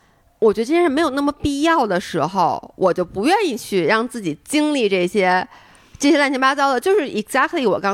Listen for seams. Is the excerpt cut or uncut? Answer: uncut